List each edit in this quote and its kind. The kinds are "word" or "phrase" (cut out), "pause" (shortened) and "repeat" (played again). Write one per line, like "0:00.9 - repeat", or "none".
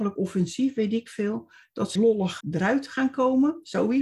0:02.0 - word
0:02.4 - word